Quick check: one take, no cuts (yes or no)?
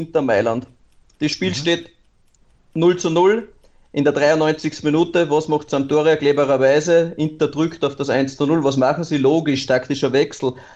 yes